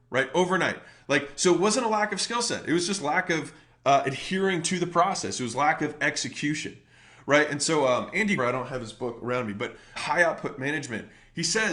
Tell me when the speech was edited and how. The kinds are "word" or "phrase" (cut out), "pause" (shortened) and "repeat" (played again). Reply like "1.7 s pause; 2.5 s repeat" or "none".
8.4 s word; 10.0 s word